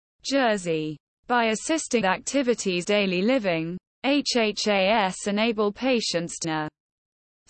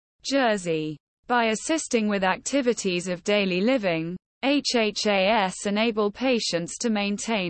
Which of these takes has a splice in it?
first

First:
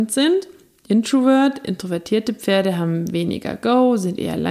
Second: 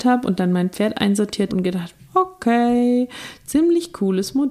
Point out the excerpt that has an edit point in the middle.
second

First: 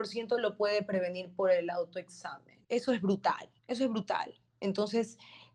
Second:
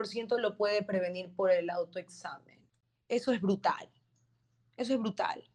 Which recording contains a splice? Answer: first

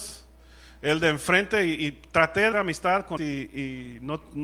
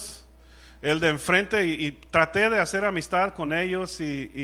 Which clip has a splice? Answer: first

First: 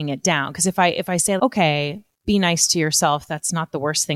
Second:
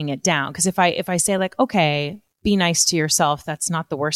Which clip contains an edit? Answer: first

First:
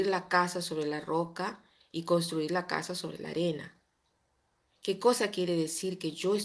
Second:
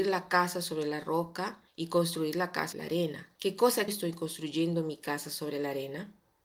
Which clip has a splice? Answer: second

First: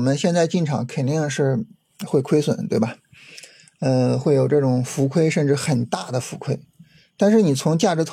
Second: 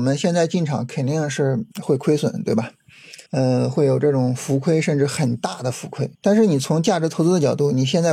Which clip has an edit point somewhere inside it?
second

